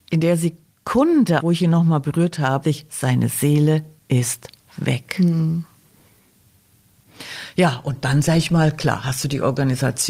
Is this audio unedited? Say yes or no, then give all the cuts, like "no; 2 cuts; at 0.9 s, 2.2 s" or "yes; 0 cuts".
no; 2 cuts; at 1.4 s, 2.6 s